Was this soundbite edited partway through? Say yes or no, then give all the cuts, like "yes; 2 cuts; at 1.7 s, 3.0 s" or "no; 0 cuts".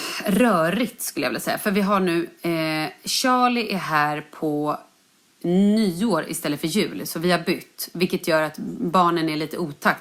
no; 0 cuts